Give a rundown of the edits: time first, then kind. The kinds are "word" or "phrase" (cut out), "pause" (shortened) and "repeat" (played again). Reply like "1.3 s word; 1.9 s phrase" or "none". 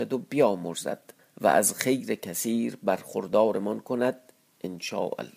1.2 s pause